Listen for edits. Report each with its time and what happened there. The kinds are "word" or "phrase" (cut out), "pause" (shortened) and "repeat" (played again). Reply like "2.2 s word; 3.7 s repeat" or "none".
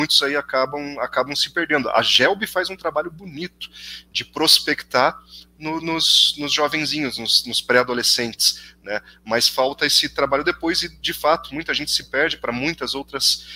none